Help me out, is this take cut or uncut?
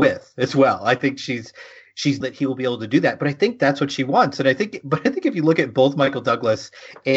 cut